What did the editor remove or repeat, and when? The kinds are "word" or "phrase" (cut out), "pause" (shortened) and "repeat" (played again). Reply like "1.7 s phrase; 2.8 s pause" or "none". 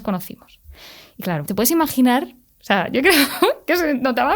1.5 s word